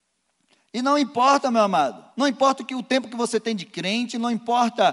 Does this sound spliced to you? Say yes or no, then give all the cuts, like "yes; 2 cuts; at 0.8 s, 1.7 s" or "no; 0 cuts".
yes; 1 cut; at 2.1 s